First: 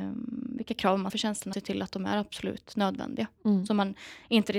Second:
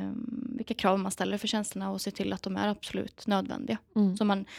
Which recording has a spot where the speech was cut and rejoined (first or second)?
first